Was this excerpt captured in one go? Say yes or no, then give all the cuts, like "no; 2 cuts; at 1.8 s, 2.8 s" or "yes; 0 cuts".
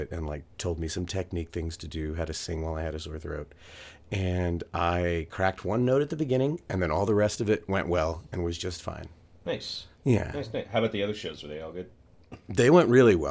no; 2 cuts; at 9.9 s, 12.0 s